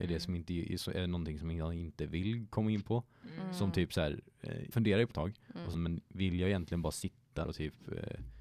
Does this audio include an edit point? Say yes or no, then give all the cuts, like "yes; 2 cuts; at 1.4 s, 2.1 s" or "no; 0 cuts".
yes; 4 cuts; at 4.7 s, 5.1 s, 5.7 s, 7.4 s